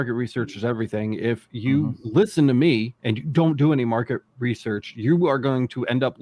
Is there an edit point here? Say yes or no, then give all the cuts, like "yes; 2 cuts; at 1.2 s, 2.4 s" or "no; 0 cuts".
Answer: yes; 1 cut; at 3.0 s